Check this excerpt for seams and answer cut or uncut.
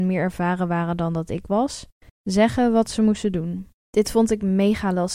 cut